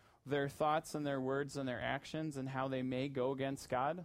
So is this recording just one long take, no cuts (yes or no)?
yes